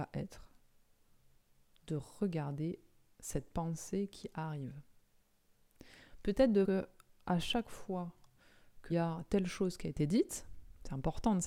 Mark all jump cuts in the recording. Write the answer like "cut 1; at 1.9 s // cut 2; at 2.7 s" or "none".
cut 1; at 6.6 s // cut 2; at 8.9 s